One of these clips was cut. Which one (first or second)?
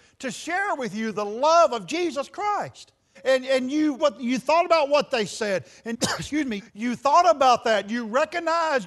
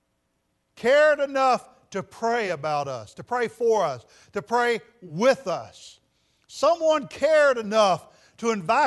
first